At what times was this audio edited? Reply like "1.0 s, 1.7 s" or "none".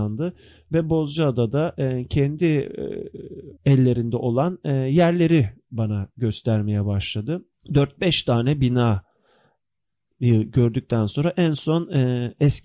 3.6 s, 7.5 s